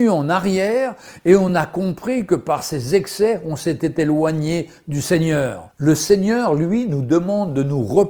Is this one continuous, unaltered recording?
yes; 0 cuts

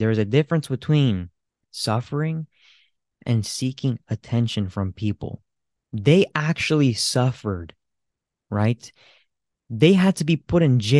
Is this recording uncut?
yes; 0 cuts

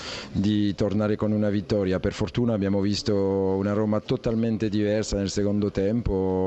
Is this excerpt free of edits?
yes; 0 cuts

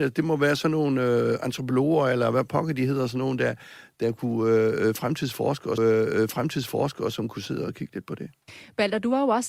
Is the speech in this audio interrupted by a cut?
yes; 1 cut; at 5.8 s

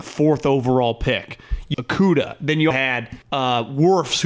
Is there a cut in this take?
yes; 3 cuts; at 1.7 s, 2.7 s, 3.2 s

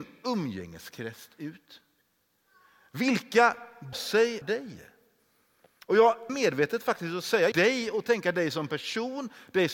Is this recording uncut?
no; 4 cuts; at 3.9 s, 4.4 s, 6.3 s, 7.5 s

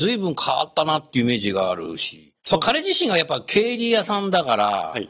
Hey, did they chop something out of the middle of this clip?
yes; 1 cut; at 2.4 s

